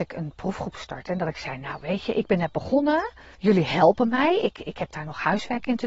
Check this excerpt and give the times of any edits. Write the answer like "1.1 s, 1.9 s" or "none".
3.3 s